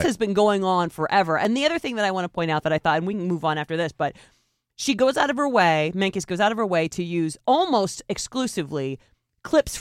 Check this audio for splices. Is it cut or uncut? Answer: uncut